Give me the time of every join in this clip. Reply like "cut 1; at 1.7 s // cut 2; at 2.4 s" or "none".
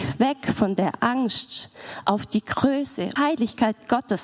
cut 1; at 3.2 s